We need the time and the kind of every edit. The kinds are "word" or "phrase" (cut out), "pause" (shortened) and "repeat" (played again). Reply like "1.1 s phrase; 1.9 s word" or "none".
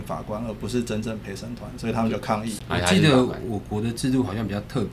none